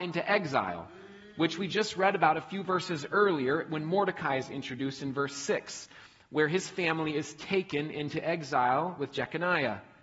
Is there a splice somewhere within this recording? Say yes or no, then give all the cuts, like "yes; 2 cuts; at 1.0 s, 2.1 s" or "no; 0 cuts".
no; 0 cuts